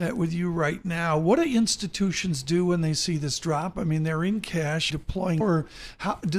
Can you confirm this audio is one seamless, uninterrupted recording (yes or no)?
no